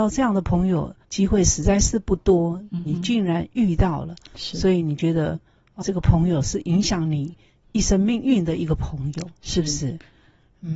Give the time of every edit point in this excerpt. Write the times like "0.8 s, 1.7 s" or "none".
1.0 s, 5.8 s